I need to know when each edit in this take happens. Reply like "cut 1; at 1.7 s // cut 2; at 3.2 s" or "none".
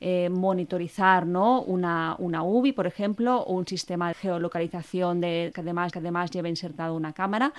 cut 1; at 4.1 s // cut 2; at 5.5 s // cut 3; at 5.9 s